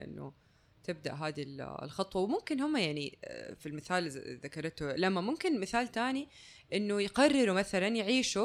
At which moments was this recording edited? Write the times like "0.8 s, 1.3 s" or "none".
none